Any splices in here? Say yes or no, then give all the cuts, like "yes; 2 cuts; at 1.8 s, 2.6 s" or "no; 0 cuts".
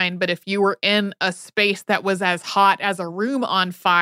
no; 0 cuts